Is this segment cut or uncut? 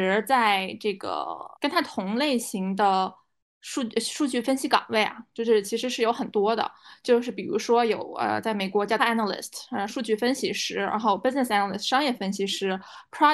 cut